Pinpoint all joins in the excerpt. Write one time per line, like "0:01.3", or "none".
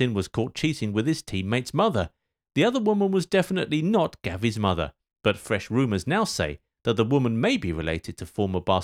none